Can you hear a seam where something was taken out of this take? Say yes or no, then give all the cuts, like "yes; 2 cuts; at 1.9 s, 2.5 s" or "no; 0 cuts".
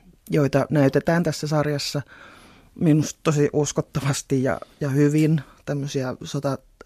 no; 0 cuts